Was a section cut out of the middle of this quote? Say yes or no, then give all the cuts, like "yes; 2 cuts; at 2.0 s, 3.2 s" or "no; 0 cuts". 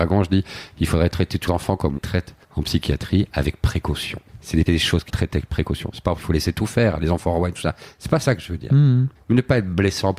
yes; 8 cuts; at 1.5 s, 2.0 s, 2.4 s, 4.3 s, 4.7 s, 5.1 s, 6.2 s, 9.2 s